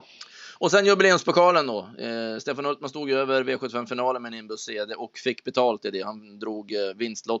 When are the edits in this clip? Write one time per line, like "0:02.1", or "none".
none